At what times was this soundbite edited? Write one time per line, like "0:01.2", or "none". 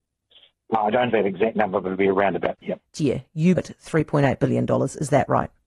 0:01.1
0:02.6
0:02.9
0:03.6